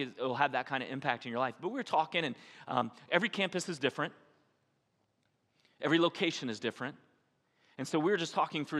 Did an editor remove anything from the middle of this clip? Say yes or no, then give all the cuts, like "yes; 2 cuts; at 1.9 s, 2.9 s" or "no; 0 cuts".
no; 0 cuts